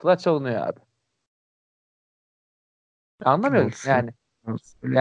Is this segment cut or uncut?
uncut